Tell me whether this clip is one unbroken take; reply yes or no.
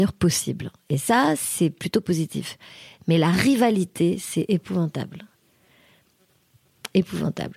yes